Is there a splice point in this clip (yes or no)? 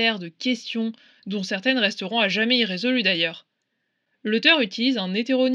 no